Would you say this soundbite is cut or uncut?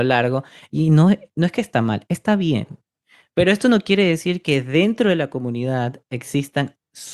uncut